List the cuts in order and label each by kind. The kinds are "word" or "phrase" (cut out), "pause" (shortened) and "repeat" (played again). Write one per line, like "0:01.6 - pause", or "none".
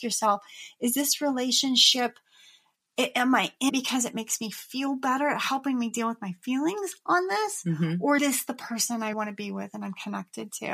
0:03.7 - word
0:08.2 - word
0:09.1 - word